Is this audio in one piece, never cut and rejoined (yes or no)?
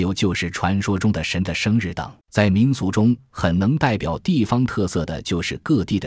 no